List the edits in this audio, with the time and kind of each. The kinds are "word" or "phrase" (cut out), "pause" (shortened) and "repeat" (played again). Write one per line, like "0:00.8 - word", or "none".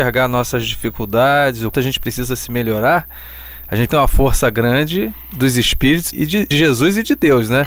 0:01.7 - word
0:03.9 - word
0:06.1 - word
0:06.5 - word